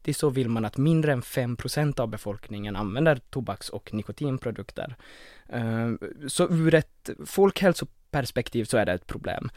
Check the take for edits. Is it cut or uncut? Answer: uncut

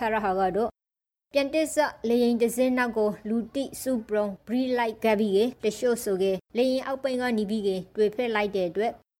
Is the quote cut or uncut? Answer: cut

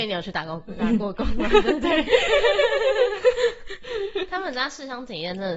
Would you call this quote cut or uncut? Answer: uncut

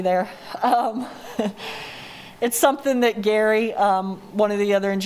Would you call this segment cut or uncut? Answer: uncut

